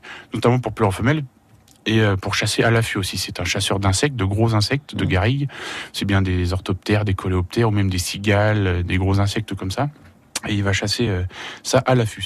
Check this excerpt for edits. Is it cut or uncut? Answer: uncut